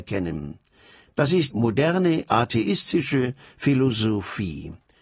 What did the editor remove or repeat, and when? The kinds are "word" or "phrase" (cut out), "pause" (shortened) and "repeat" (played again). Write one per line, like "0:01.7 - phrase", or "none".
0:01.5 - word

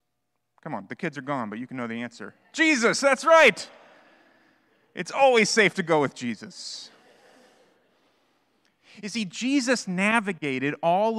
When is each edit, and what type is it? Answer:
none

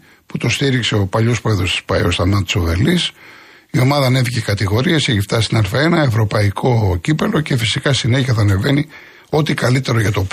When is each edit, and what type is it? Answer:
none

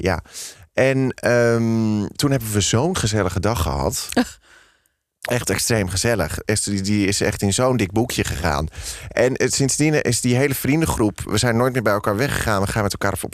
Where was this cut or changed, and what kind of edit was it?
none

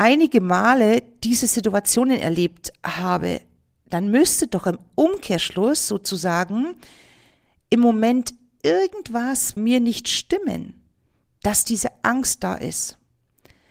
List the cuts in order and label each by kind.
0:09.6 - word

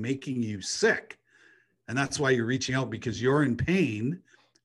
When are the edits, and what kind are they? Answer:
none

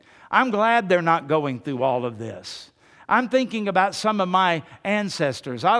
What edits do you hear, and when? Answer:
none

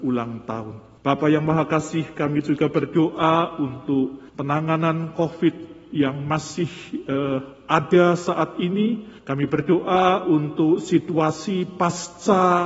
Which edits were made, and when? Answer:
0:01.0 - pause
0:04.3 - pause
0:09.2 - pause

